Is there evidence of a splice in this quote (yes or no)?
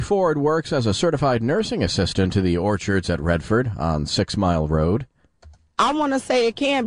no